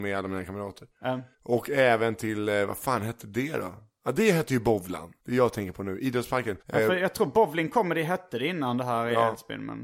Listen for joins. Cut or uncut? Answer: cut